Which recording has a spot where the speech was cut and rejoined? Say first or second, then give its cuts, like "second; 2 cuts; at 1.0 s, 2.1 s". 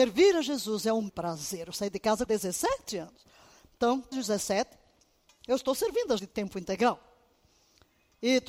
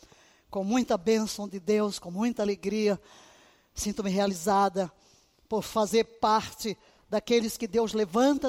first; 4 cuts; at 1.1 s, 2.3 s, 4.1 s, 6.2 s